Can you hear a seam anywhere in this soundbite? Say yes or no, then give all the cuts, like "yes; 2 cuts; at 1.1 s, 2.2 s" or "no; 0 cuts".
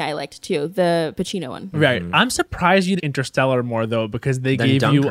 yes; 1 cut; at 3.0 s